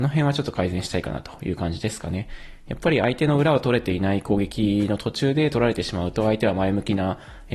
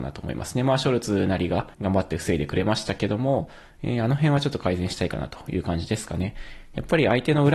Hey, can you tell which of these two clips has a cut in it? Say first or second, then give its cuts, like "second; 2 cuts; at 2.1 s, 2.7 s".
second; 1 cut; at 1.7 s